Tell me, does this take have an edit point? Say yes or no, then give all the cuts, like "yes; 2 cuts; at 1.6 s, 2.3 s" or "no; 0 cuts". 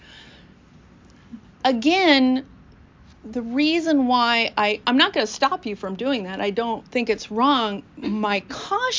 yes; 3 cuts; at 1.4 s, 4.8 s, 7.9 s